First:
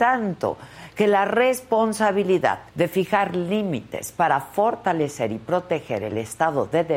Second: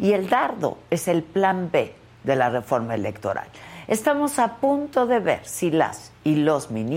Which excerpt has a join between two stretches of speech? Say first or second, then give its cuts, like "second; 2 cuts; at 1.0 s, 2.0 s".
first; 1 cut; at 2.7 s